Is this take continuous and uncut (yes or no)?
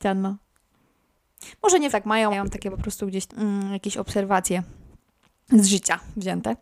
no